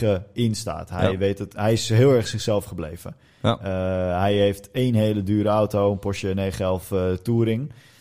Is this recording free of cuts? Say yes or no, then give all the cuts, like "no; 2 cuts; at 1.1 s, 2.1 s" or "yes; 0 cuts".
yes; 0 cuts